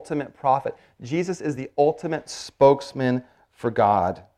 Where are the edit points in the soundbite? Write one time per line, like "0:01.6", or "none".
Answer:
none